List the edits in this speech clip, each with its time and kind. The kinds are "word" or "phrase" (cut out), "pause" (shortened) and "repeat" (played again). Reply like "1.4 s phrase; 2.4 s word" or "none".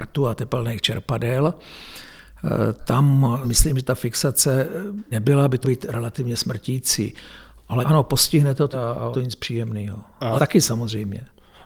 2.8 s word; 3.4 s word; 5.1 s word; 5.6 s word; 7.8 s word; 8.7 s word; 9.1 s word; 10.4 s word